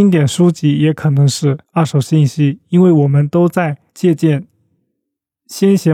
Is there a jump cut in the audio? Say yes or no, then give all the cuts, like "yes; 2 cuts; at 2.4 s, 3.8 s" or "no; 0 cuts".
yes; 2 cuts; at 1.6 s, 3.9 s